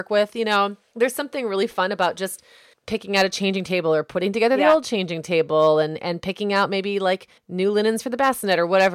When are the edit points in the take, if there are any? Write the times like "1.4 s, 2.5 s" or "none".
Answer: 2.7 s, 7.4 s